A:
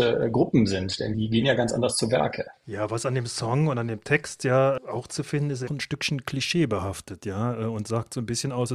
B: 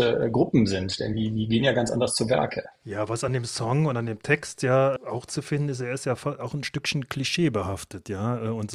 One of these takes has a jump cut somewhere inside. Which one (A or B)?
A